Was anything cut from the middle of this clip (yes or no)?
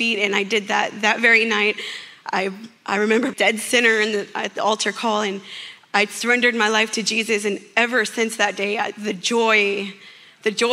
yes